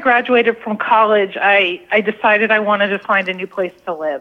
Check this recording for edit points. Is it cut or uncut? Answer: uncut